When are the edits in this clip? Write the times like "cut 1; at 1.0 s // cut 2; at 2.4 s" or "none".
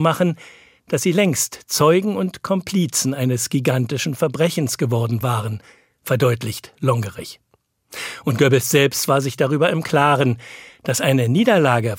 none